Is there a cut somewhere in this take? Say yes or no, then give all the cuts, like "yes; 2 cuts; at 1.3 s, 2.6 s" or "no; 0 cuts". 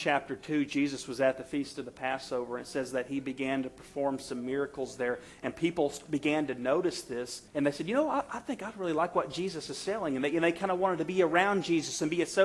yes; 1 cut; at 7.5 s